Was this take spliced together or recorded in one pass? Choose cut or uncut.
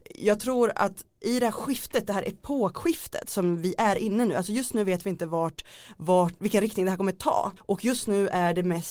cut